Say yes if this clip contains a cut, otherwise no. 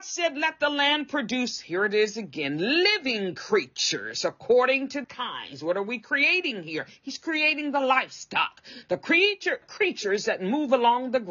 yes